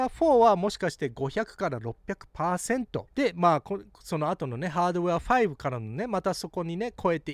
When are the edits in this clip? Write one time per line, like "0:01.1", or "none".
0:03.1